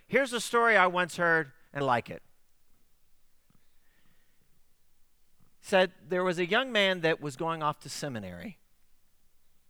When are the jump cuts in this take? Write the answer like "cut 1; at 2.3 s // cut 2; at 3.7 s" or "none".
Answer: cut 1; at 1.8 s